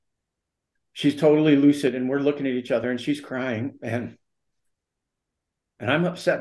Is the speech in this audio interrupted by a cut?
no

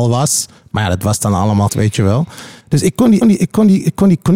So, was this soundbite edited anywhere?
yes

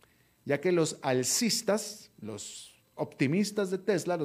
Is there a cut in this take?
no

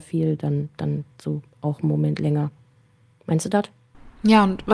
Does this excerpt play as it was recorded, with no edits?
yes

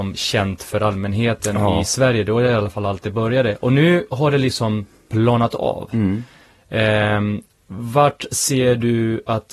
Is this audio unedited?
yes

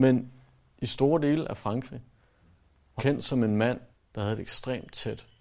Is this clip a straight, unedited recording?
no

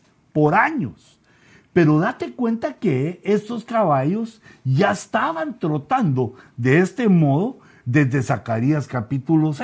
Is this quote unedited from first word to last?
yes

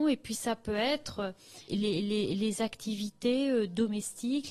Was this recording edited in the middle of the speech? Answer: yes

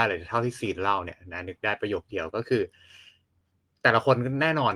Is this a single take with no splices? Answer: yes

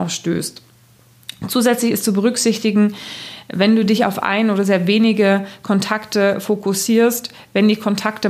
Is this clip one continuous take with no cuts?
yes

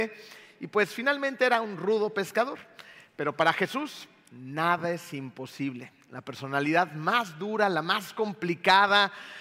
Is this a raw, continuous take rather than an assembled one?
yes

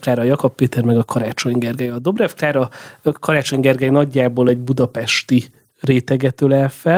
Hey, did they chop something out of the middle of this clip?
no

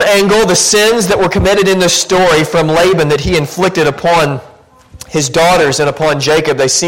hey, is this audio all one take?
yes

